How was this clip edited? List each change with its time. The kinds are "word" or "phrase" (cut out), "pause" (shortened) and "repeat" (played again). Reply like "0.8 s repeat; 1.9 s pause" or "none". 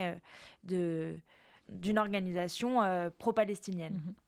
1.6 s word